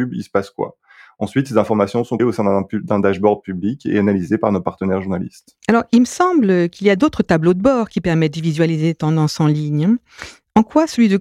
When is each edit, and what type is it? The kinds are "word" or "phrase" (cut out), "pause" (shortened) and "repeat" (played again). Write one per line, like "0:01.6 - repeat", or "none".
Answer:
0:02.2 - word

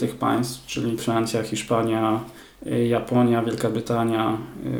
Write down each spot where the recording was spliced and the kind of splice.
0:01.0 - phrase

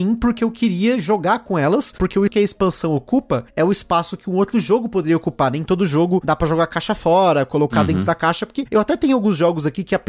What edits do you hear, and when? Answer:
0:02.3 - word

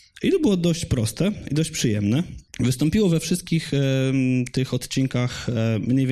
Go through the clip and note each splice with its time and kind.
0:02.5 - pause

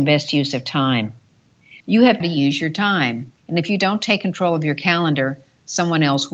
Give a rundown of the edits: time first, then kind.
0:01.8 - pause
0:02.2 - phrase
0:03.4 - pause

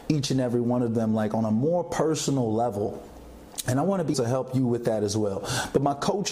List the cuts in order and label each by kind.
0:04.1 - word

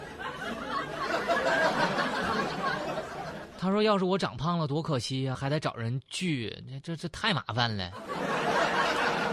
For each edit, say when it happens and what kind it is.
0:05.3 - word

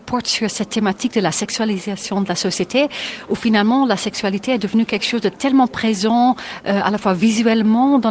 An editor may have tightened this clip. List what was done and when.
none

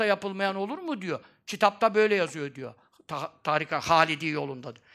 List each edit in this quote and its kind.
none

